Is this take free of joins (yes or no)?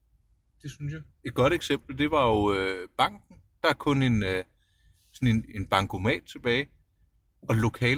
no